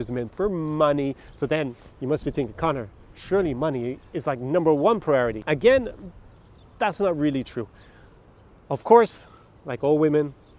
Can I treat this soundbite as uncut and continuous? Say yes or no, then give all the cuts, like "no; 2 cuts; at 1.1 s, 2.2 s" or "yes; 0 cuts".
yes; 0 cuts